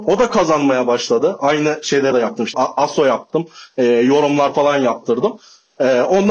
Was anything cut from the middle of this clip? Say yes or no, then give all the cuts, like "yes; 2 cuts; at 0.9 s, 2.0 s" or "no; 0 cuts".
yes; 2 cuts; at 2.1 s, 2.5 s